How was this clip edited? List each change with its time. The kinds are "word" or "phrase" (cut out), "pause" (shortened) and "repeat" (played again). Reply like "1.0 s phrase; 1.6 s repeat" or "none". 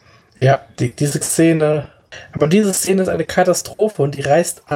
1.2 s word

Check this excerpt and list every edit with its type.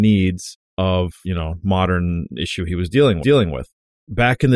1.2 s word; 3.2 s repeat

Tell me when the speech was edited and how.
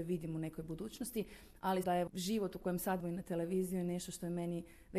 1.8 s word; 3.0 s phrase

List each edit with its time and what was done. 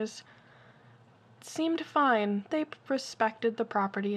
1.4 s word; 2.5 s word

